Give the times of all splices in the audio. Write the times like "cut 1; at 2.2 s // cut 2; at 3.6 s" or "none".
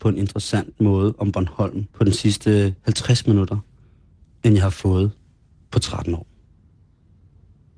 cut 1; at 1.9 s